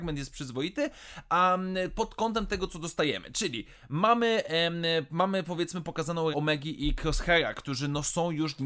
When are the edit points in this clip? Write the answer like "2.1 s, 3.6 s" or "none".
6.3 s